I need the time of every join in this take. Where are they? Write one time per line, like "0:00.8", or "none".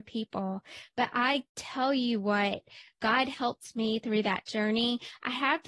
0:01.5